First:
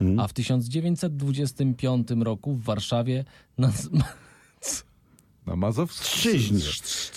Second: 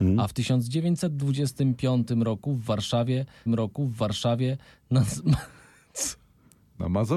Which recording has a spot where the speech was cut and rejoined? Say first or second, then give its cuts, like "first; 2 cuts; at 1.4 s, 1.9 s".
second; 1 cut; at 3.5 s